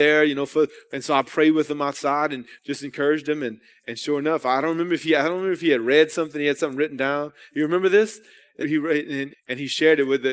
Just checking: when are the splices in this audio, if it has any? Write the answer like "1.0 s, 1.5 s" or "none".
8.6 s, 9.3 s